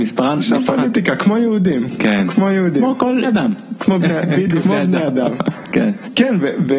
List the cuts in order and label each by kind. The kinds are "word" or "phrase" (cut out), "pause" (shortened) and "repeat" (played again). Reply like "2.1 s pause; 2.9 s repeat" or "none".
3.2 s phrase; 4.6 s word

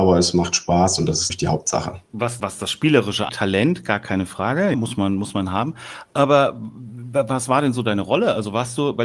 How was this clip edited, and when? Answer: 1.3 s word; 2.4 s word; 3.3 s word; 4.7 s word

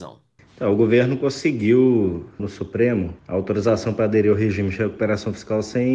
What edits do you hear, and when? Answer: 2.4 s word; 3.2 s pause

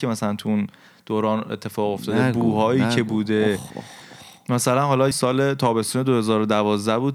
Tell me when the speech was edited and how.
5.1 s phrase

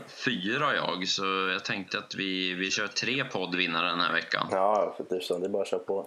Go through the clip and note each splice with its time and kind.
none

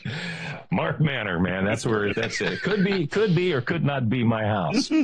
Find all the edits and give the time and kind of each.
2.1 s word

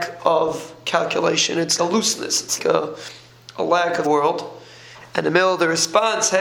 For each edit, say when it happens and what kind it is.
1.8 s word; 2.6 s word; 4.0 s phrase

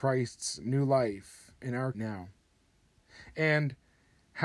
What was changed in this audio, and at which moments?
1.9 s phrase

